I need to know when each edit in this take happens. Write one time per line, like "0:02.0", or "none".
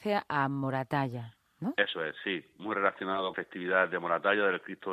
0:03.3